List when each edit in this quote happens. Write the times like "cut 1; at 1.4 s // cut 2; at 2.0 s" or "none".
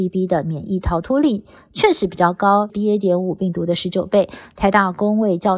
cut 1; at 2.7 s